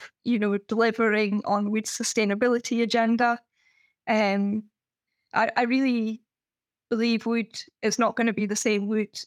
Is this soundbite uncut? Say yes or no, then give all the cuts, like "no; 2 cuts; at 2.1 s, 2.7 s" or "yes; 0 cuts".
yes; 0 cuts